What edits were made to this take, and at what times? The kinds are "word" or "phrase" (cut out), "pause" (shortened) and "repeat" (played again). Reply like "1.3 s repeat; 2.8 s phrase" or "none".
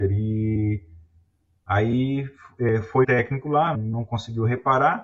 3.0 s word; 3.7 s word